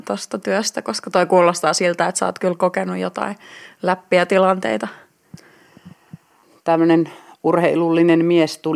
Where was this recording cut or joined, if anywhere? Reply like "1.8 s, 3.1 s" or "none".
none

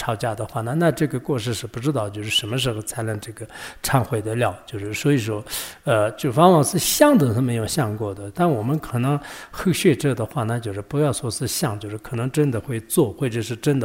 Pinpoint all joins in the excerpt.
none

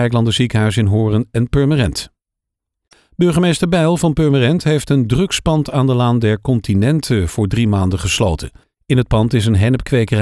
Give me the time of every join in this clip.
none

